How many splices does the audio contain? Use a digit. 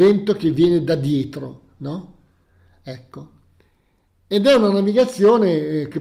0